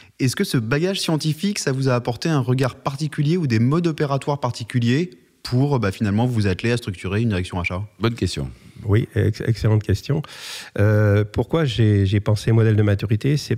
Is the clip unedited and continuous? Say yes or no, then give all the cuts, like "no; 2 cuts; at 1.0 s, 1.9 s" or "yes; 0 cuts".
yes; 0 cuts